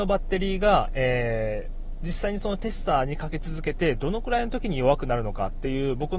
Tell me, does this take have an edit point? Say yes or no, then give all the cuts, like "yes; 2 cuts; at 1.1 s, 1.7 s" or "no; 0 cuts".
no; 0 cuts